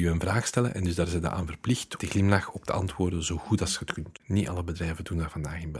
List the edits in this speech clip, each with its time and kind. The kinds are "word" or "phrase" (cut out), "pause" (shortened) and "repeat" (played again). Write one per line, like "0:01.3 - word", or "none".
0:02.0 - phrase